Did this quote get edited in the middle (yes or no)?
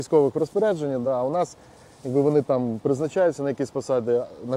no